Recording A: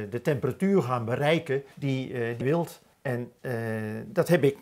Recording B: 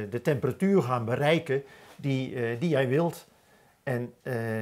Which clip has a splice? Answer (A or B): A